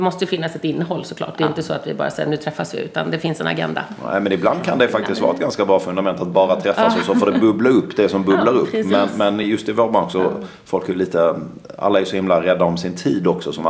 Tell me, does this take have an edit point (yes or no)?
no